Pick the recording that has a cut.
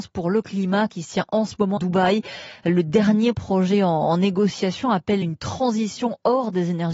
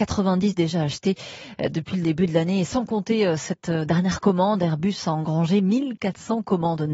first; 2 cuts; at 1.8 s, 5.2 s

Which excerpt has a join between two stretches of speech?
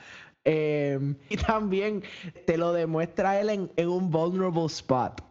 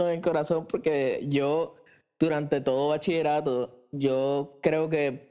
first; 2 cuts; at 1.3 s, 2.4 s

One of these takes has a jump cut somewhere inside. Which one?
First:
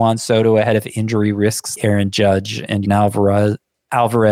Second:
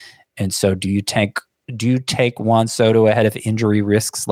first; 2 cuts; at 1.8 s, 2.8 s

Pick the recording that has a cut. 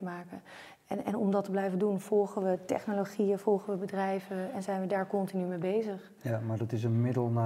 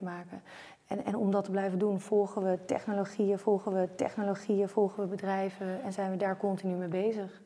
second; 1 cut; at 3.7 s

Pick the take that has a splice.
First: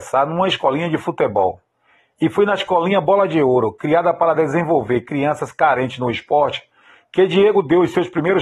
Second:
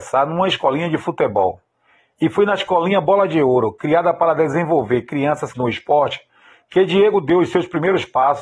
second; 1 cut; at 5.5 s

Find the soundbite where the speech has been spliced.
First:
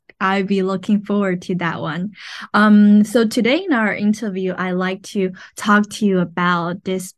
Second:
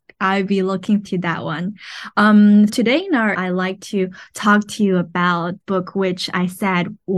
second; 4 cuts; at 1.0 s, 2.7 s, 3.3 s, 5.6 s

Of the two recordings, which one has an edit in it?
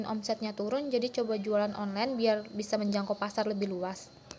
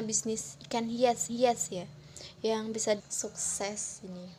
second; 2 cuts; at 1.3 s, 3.0 s

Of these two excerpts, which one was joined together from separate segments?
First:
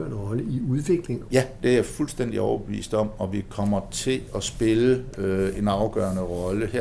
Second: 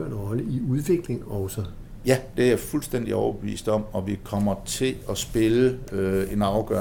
first; 1 cut; at 1.2 s

